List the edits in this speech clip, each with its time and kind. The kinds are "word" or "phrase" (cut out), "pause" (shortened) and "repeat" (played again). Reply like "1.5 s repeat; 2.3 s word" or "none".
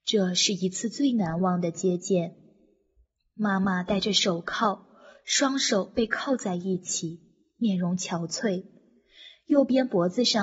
none